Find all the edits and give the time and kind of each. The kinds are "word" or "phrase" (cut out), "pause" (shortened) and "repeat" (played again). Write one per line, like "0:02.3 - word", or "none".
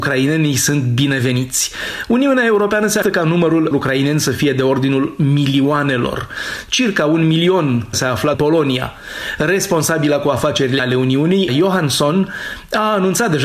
0:03.0 - word
0:03.7 - word
0:07.9 - phrase
0:08.3 - phrase
0:10.8 - word
0:11.5 - word